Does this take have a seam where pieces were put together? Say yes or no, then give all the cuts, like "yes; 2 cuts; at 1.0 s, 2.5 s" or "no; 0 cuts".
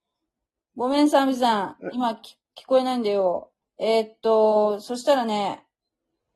yes; 1 cut; at 3.6 s